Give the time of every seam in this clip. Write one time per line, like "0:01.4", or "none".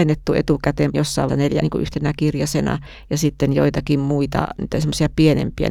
0:00.9
0:01.3
0:01.6

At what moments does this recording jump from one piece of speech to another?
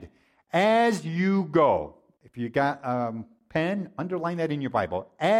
none

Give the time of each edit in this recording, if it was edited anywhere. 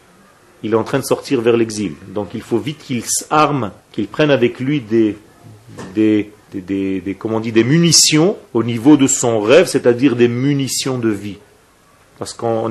0:03.8
0:06.4
0:08.5

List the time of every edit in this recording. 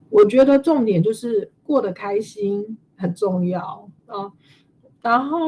0:04.0

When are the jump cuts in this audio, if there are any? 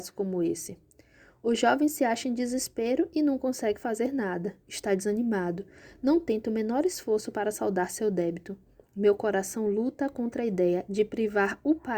none

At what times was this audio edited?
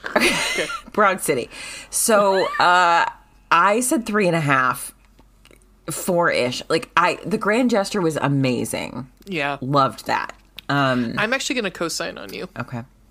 none

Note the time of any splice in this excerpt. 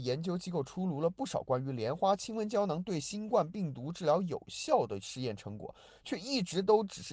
none

